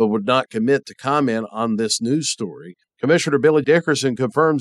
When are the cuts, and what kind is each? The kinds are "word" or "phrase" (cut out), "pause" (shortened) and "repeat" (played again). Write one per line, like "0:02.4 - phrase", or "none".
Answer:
0:03.6 - word